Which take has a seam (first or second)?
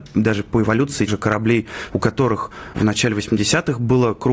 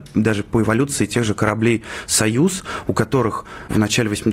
first